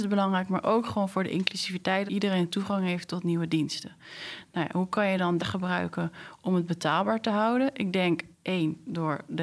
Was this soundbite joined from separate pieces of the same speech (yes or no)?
yes